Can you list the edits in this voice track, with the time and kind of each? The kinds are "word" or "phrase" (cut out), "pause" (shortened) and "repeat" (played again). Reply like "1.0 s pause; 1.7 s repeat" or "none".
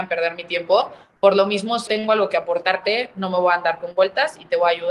1.9 s word